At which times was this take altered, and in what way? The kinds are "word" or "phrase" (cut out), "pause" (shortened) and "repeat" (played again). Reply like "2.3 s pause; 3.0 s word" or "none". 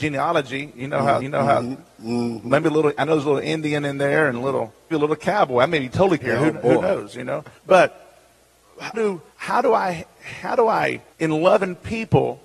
1.2 s repeat; 4.9 s word; 6.2 s word; 7.6 s pause; 8.9 s word; 9.3 s pause; 11.1 s pause